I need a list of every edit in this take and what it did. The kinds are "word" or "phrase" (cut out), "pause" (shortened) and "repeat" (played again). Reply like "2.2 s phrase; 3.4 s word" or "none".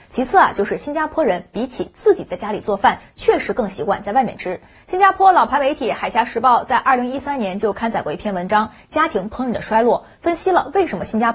4.7 s pause

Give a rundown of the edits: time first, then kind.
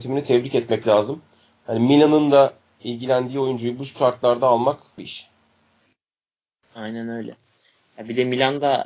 5.0 s word

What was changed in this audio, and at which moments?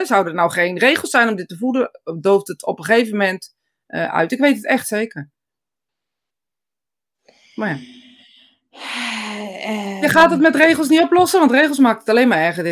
none

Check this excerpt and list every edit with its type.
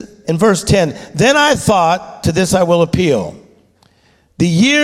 none

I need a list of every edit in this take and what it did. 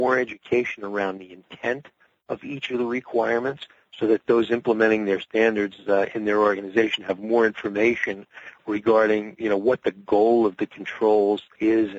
none

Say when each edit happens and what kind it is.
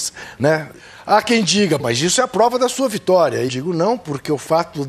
1.8 s word; 3.5 s word

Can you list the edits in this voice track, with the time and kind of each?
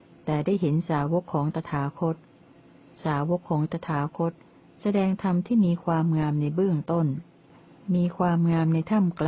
none

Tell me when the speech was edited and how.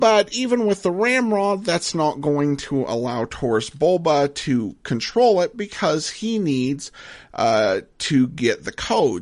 none

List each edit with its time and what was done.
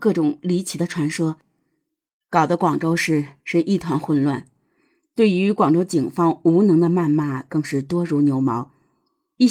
3.4 s pause

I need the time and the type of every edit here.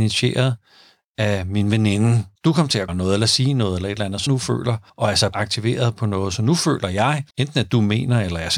2.4 s pause; 2.9 s word; 4.3 s word; 4.9 s pause; 5.3 s word; 7.3 s pause

